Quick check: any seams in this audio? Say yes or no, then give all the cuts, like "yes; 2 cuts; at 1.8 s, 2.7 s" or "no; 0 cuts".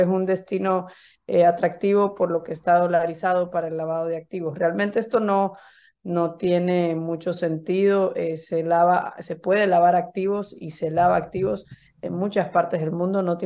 no; 0 cuts